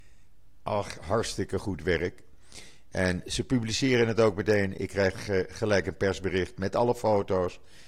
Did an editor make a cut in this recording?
no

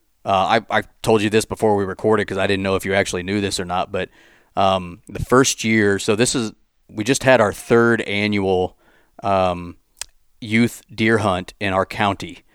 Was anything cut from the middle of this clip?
no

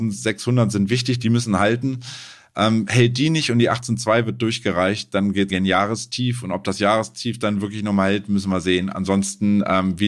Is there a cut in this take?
yes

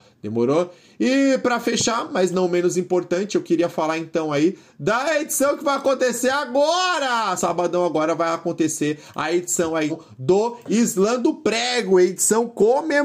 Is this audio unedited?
no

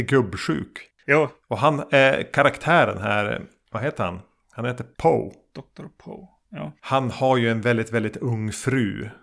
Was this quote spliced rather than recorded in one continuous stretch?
no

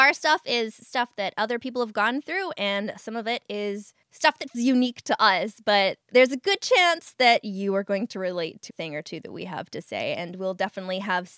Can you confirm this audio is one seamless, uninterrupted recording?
no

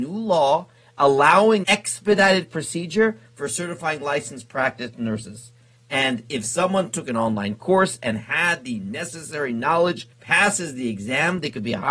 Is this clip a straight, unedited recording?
no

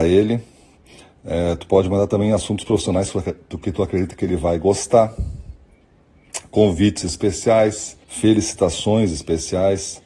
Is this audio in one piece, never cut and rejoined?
no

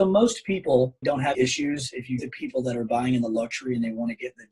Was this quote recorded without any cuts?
no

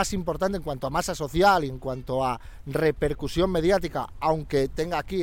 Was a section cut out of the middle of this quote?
no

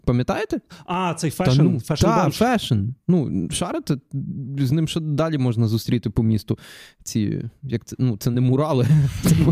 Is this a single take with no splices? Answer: yes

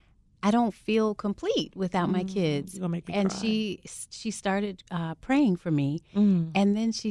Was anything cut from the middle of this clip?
yes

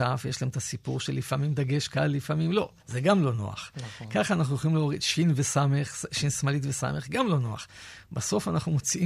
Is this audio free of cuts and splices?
no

